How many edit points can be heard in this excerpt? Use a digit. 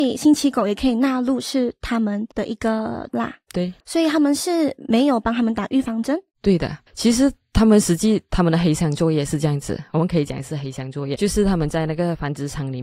6